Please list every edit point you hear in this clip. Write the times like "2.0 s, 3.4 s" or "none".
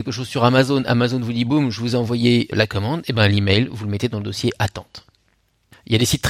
none

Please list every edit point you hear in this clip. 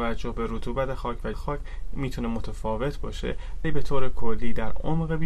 1.3 s, 3.6 s

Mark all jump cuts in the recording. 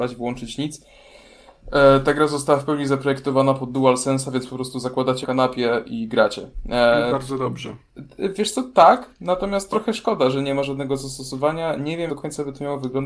5.2 s, 12.1 s

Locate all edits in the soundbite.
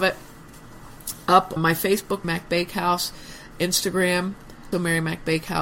1.6 s, 2.2 s, 4.7 s

